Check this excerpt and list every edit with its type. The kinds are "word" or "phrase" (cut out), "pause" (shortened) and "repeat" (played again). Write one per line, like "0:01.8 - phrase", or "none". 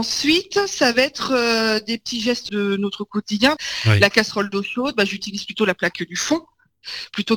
0:02.5 - word